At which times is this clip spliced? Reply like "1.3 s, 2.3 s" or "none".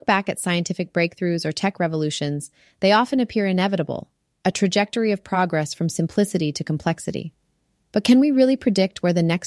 none